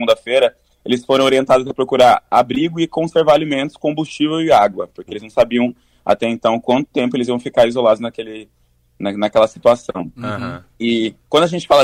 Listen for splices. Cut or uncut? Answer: uncut